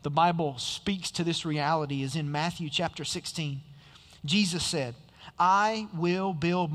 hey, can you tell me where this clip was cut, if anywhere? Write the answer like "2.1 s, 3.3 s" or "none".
none